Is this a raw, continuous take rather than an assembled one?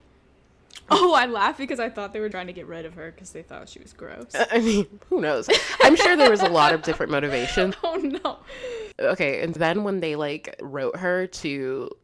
no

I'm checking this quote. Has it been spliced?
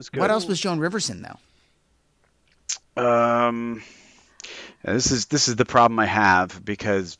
no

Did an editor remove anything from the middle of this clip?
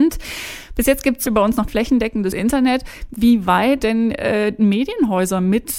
yes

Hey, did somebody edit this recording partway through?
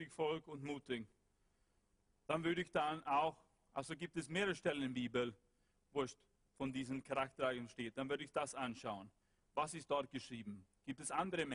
no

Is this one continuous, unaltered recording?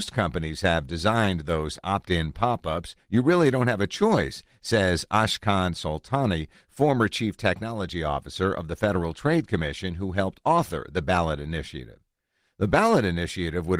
yes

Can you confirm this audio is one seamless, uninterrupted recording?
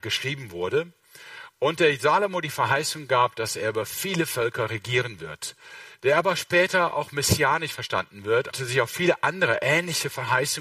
no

